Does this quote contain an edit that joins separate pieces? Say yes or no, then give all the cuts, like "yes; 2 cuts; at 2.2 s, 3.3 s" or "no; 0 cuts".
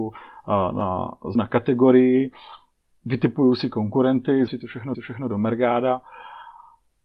yes; 4 cuts; at 1.3 s, 2.7 s, 4.5 s, 4.9 s